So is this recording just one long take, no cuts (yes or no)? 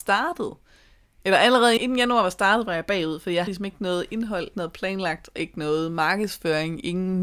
no